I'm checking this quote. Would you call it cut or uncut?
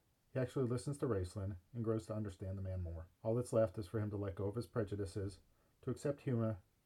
cut